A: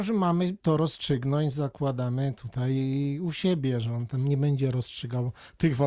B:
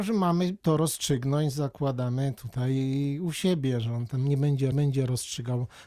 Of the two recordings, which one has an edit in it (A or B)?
B